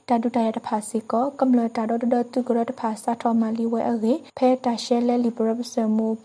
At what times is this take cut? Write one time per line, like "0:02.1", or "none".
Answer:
0:04.3